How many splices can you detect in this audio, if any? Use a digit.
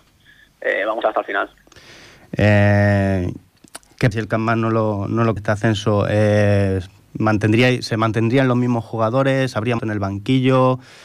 4